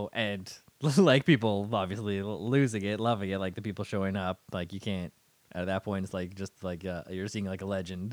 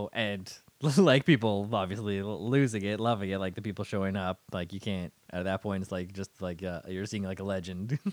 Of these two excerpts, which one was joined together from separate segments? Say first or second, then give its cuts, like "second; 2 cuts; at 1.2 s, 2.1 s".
second; 1 cut; at 5.2 s